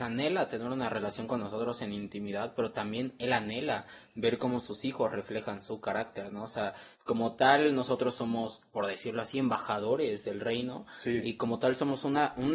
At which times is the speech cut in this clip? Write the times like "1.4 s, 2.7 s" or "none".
6.9 s, 8.7 s